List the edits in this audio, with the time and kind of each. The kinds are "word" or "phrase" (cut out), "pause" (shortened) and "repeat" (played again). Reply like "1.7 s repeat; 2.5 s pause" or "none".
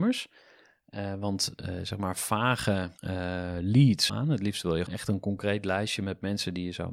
3.0 s pause; 4.1 s phrase; 4.9 s word